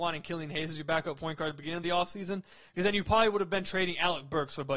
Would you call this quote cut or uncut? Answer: uncut